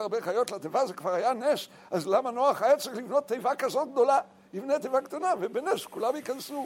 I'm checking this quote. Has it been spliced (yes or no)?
no